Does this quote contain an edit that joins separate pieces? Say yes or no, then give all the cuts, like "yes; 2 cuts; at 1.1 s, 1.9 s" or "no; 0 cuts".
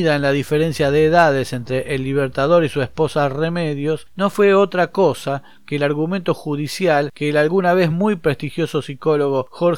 no; 0 cuts